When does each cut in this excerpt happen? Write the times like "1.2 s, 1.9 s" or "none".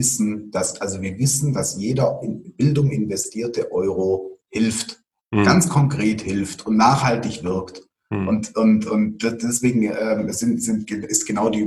none